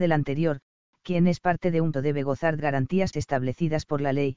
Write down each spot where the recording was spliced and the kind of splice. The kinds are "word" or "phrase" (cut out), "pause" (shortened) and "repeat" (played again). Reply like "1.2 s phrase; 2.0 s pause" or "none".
1.9 s word; 2.6 s word; 3.1 s word